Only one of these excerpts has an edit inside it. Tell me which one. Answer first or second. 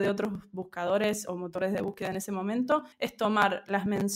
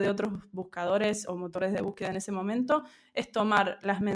first